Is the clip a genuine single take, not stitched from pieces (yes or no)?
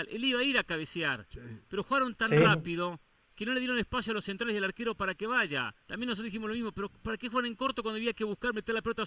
no